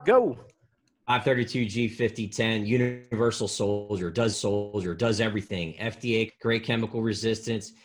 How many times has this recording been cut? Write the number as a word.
two